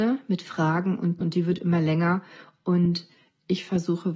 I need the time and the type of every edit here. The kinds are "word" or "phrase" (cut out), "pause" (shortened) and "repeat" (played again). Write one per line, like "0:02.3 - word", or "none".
0:01.2 - word